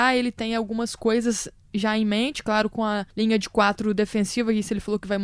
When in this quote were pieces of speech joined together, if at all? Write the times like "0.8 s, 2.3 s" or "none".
3.1 s